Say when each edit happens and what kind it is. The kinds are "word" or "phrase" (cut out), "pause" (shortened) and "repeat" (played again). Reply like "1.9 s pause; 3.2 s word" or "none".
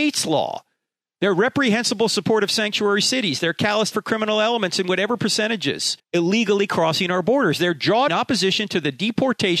3.9 s word; 6.0 s pause; 8.1 s word